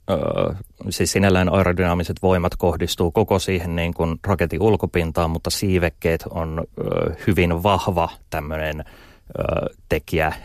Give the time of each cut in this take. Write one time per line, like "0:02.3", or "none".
none